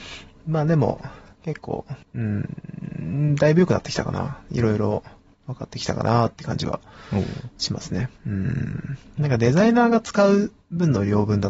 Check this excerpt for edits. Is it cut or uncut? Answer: cut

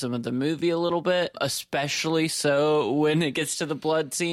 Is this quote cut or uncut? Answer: uncut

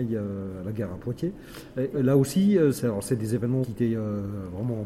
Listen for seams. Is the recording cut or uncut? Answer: cut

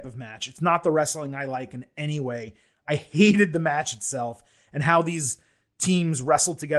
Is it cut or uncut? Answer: uncut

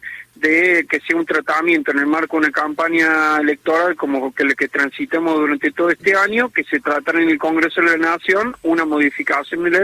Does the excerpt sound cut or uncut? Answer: uncut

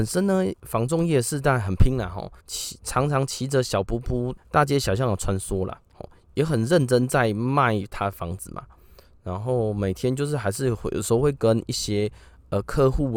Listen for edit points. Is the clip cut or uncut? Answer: cut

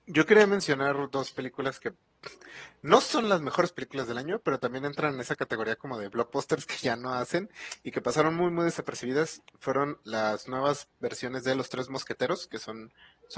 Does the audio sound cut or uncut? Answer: uncut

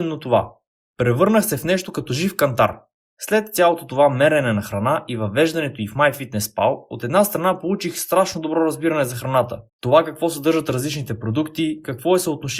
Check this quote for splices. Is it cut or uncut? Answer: cut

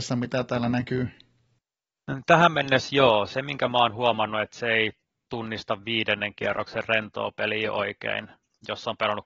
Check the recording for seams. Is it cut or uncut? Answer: uncut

